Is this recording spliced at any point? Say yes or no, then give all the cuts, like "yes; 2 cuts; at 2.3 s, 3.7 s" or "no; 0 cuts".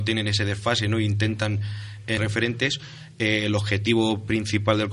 yes; 1 cut; at 2.2 s